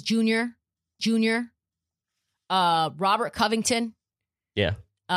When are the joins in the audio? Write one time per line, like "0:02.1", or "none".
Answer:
0:01.0